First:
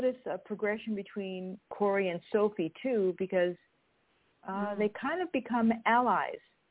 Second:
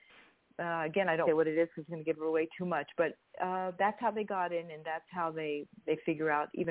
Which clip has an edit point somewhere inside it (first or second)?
second